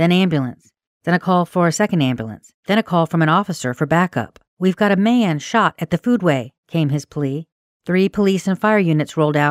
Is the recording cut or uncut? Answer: cut